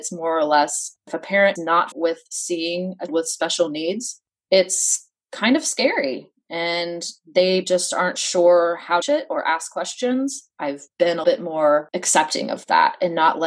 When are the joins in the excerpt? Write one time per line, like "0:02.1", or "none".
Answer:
0:01.6
0:01.9
0:03.1
0:07.6
0:09.0
0:11.2